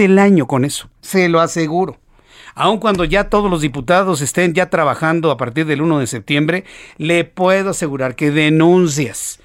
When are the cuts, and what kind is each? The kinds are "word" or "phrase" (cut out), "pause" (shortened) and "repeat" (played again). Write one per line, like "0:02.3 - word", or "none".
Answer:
0:01.0 - pause